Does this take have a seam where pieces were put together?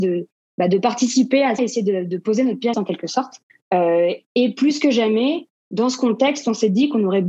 yes; 3 cuts; at 1.6 s, 2.7 s, 3.5 s

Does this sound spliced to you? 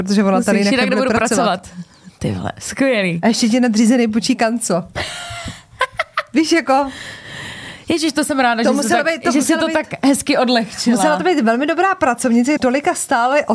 yes; 1 cut; at 12.6 s

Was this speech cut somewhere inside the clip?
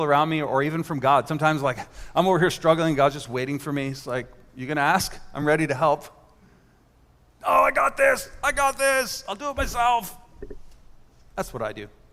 no; 0 cuts

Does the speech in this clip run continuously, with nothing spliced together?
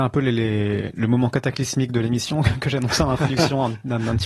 yes; 0 cuts

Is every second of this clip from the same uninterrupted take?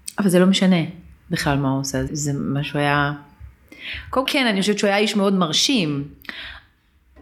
no; 3 cuts; at 1.2 s, 2.1 s, 4.3 s

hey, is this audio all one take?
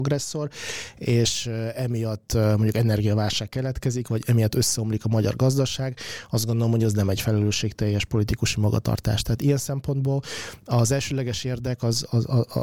yes; 0 cuts

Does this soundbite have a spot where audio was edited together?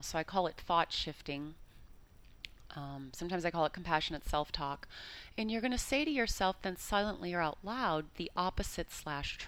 no; 0 cuts

